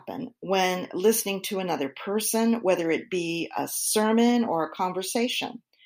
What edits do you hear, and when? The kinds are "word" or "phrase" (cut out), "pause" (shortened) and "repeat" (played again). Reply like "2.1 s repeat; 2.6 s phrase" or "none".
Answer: none

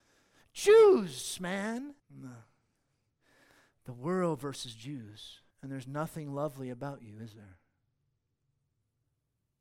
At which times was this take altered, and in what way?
2.0 s pause; 5.5 s pause

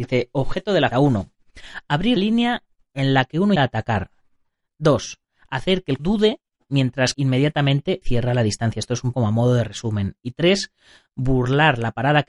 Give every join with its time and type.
0.9 s word; 2.2 s word; 3.6 s word; 6.0 s word; 7.1 s word; 8.0 s word; 9.1 s word

